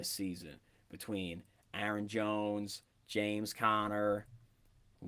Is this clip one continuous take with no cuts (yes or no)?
yes